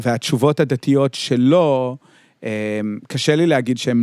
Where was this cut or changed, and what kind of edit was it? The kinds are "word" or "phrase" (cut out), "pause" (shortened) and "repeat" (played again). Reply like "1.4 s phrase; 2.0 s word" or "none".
none